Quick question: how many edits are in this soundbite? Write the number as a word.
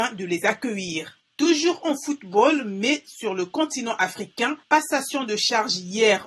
one